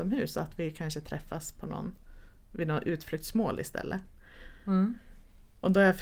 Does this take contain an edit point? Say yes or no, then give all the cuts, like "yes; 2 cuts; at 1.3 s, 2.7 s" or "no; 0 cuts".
no; 0 cuts